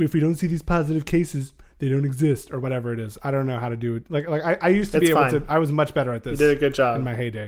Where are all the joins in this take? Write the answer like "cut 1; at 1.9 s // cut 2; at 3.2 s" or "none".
none